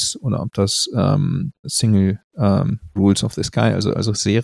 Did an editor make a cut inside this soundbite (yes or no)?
yes